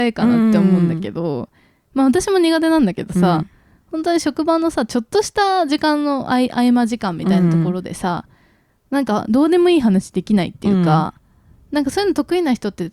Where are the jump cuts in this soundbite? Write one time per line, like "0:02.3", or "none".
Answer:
none